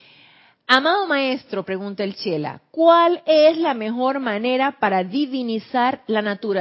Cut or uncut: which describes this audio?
uncut